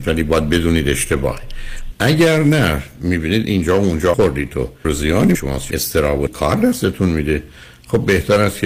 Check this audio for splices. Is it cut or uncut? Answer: cut